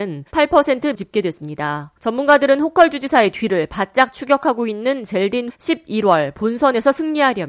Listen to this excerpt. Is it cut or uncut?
cut